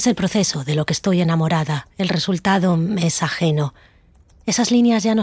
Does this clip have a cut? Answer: no; 0 cuts

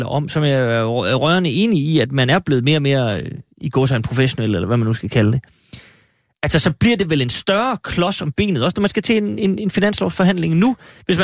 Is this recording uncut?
no; 1 cut; at 3.5 s

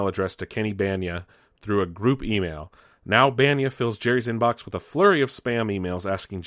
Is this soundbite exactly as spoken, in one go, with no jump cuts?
yes; 0 cuts

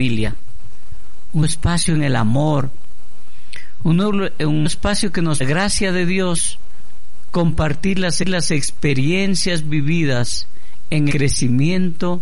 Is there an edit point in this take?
yes; 5 cuts; at 1.4 s, 4.6 s, 5.4 s, 8.2 s, 11.1 s

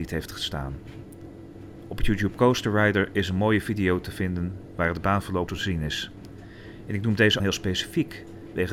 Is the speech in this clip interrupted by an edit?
yes; 2 cuts; at 5.5 s, 7.4 s

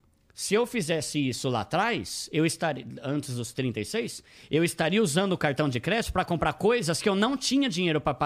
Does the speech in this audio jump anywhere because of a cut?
no; 0 cuts

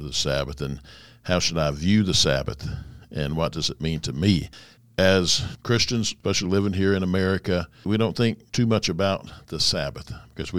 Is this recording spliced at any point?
no; 0 cuts

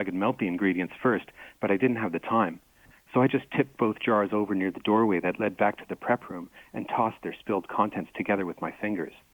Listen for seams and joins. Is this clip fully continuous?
yes; 0 cuts

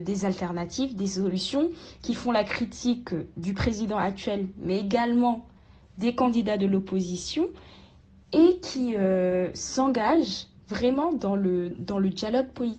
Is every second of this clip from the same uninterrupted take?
no; 1 cut; at 11.7 s

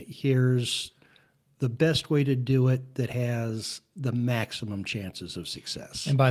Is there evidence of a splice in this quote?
no; 0 cuts

